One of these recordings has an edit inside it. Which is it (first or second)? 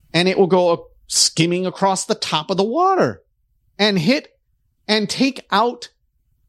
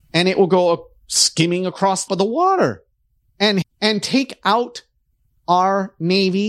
second